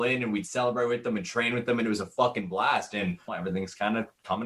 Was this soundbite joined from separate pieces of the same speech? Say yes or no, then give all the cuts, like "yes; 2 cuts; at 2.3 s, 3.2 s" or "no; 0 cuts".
yes; 1 cut; at 3.3 s